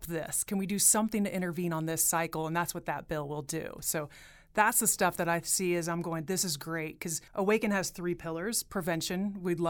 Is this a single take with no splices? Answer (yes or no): no